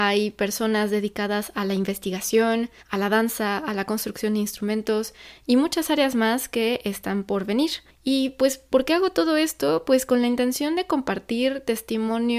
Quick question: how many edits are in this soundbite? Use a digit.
1